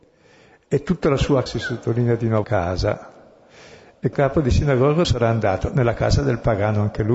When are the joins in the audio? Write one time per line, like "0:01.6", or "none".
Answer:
0:01.5
0:02.4
0:04.1
0:05.0